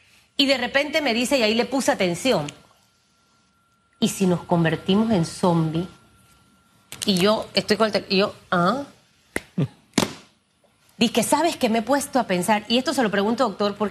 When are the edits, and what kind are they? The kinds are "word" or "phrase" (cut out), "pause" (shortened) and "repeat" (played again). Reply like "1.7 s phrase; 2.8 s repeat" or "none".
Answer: none